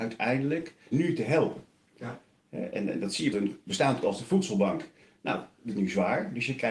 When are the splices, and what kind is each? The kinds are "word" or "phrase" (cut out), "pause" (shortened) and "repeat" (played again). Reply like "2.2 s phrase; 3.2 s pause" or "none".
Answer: 0.9 s word; 3.3 s word; 4.0 s word; 5.7 s word